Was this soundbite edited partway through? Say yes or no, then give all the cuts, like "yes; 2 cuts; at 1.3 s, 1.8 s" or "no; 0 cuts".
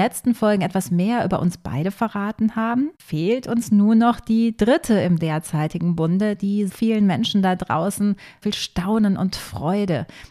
yes; 3 cuts; at 2.9 s, 6.7 s, 8.4 s